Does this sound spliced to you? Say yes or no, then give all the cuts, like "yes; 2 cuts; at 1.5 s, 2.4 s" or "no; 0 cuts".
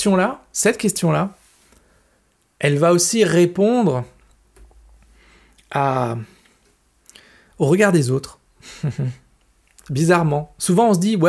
no; 0 cuts